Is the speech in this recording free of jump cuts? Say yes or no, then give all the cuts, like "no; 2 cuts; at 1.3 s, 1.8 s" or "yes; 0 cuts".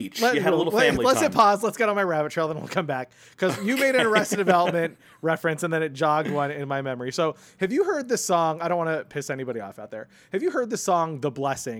yes; 0 cuts